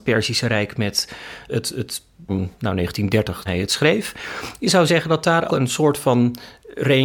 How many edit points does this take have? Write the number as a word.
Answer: five